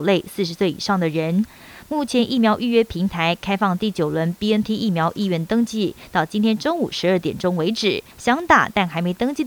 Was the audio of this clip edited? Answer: yes; 1 cut; at 8.1 s

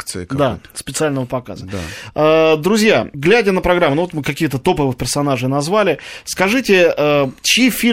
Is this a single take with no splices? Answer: yes; 0 cuts

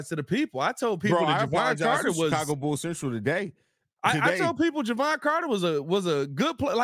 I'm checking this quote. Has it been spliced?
no; 0 cuts

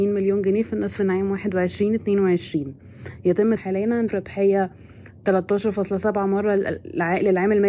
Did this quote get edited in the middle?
yes; 4 cuts; at 1.0 s, 3.6 s, 4.1 s, 5.2 s

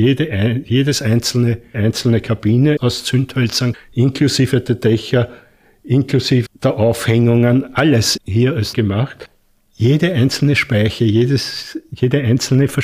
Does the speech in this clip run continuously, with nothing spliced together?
no; 6 cuts; at 1.7 s, 2.8 s, 3.7 s, 6.5 s, 8.2 s, 8.7 s

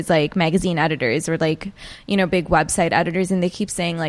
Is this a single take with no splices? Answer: yes; 0 cuts

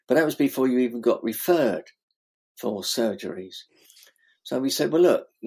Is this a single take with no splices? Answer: yes; 0 cuts

